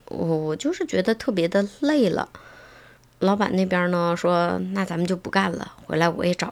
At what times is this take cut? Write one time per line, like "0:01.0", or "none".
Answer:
none